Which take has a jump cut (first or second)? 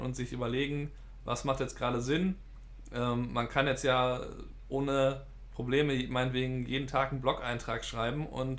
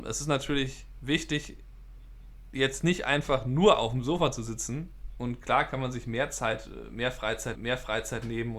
second